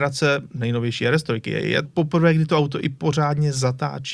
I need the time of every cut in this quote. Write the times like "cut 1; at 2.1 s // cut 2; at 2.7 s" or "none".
cut 1; at 1.8 s